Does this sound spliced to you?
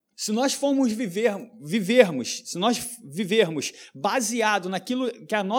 no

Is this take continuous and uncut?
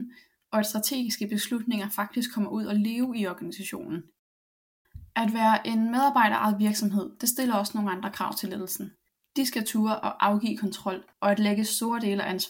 no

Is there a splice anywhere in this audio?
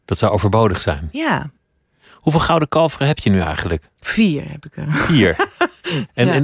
no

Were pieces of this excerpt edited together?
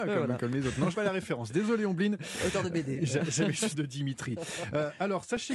yes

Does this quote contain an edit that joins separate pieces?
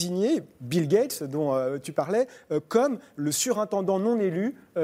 no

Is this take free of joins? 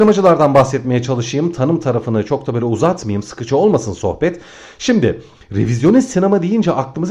yes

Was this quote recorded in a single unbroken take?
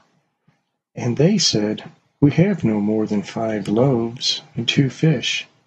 yes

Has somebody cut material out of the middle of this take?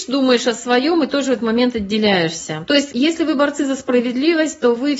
no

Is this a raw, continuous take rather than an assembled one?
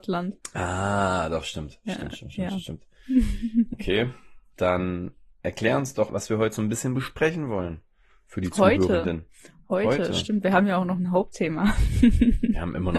no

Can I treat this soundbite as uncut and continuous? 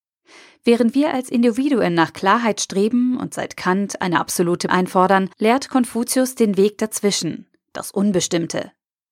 no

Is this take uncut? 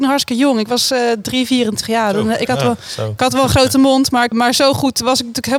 no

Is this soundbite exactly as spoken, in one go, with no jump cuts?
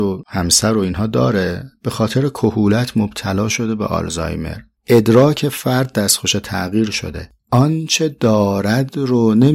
yes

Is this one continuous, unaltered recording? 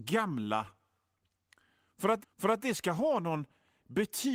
no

